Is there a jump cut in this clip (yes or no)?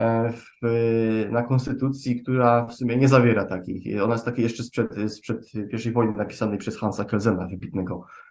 no